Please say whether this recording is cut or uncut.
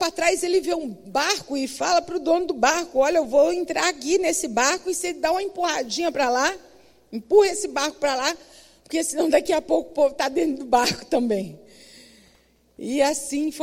uncut